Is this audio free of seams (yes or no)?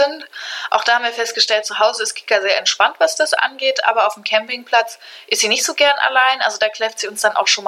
yes